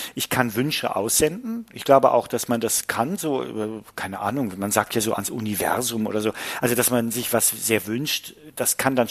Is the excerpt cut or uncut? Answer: uncut